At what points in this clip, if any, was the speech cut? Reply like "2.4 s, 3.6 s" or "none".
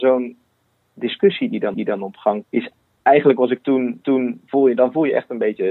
1.7 s, 2.4 s, 4.0 s